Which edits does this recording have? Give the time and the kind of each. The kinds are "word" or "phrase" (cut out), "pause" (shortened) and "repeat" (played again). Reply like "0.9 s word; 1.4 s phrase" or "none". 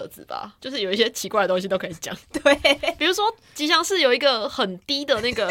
2.2 s pause